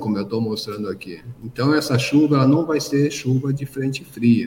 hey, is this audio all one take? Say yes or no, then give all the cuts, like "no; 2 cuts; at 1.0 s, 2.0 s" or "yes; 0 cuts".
yes; 0 cuts